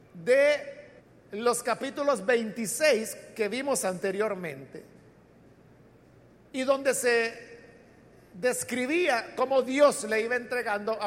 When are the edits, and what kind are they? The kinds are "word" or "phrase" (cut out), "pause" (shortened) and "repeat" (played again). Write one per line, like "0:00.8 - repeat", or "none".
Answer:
0:01.0 - pause